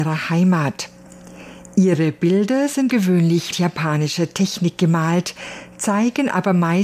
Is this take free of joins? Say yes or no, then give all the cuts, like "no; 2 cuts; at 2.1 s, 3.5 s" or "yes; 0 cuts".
no; 2 cuts; at 2.9 s, 3.5 s